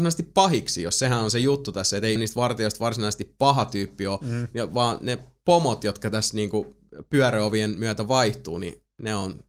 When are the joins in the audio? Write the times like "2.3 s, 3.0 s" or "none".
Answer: 2.2 s